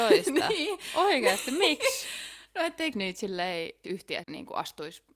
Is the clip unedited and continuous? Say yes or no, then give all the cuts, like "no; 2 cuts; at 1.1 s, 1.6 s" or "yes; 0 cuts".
no; 3 cuts; at 2.9 s, 3.8 s, 4.2 s